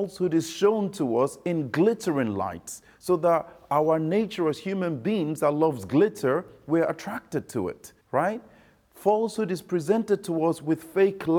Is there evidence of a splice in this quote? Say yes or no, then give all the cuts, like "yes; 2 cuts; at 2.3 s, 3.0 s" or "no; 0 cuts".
yes; 1 cut; at 8.0 s